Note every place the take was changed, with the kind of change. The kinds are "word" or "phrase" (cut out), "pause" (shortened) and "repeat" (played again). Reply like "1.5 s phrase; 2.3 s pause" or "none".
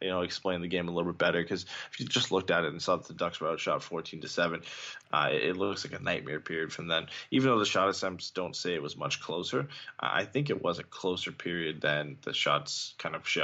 none